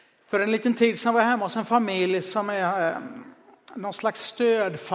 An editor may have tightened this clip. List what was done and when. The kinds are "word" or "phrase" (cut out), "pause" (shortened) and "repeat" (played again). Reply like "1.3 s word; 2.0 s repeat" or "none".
none